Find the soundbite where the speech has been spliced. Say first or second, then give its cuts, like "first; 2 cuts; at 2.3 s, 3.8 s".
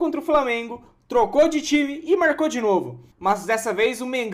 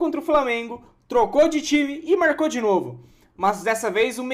first; 1 cut; at 3.1 s